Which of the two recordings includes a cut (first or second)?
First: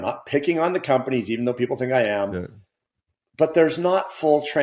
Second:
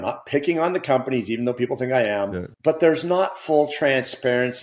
second